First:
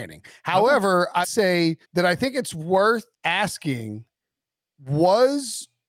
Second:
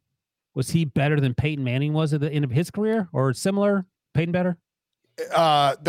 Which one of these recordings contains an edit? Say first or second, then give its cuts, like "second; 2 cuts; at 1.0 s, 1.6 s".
first; 3 cuts; at 1.2 s, 1.8 s, 3.1 s